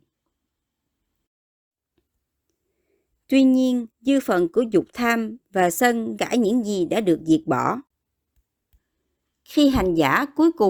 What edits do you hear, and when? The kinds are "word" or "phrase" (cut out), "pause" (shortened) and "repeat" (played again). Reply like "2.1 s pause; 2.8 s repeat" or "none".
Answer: 3.9 s pause; 6.2 s phrase